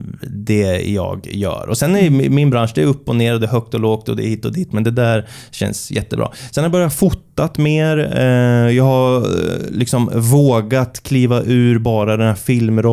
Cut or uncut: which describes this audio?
uncut